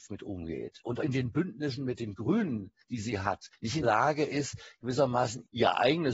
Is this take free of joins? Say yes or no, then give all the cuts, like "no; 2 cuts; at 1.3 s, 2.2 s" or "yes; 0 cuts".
no; 2 cuts; at 1.0 s, 3.8 s